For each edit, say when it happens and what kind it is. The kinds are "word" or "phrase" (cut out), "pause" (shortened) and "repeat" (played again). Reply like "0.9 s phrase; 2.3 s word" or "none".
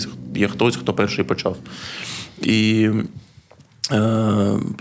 none